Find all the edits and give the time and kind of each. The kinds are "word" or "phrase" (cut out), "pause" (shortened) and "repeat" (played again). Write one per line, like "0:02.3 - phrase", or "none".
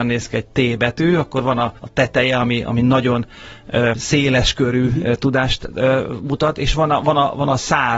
0:01.8 - pause
0:03.9 - word

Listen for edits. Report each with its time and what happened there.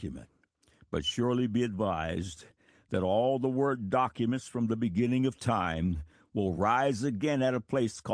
none

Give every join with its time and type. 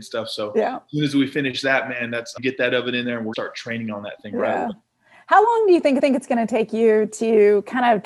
0:02.4 - word
0:03.3 - phrase
0:06.0 - repeat

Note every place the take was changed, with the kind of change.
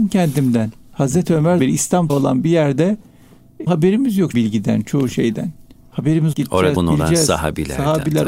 0:01.6 - word
0:02.1 - word
0:03.7 - word
0:04.3 - word
0:06.3 - word
0:06.8 - word

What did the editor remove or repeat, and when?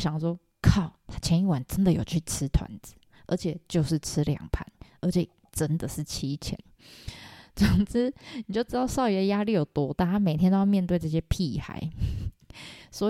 none

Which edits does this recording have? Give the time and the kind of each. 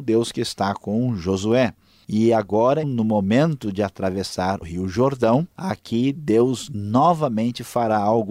0:02.8 - word
0:04.6 - word
0:05.5 - pause

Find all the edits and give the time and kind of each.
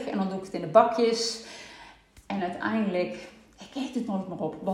none

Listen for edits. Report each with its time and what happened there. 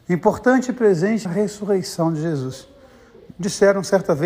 0:01.2 - word
0:03.3 - word

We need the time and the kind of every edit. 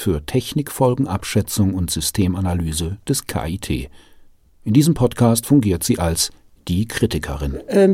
none

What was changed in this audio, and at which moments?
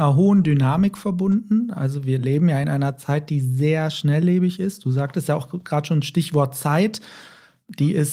none

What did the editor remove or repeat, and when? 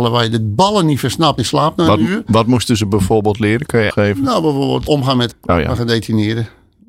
0:01.4 - phrase
0:03.9 - phrase
0:04.9 - word
0:05.3 - word

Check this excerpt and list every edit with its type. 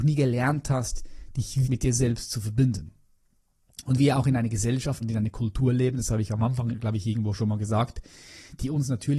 0:01.6 - word
0:05.0 - word

